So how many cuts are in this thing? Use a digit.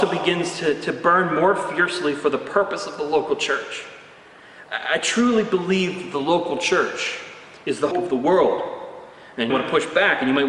2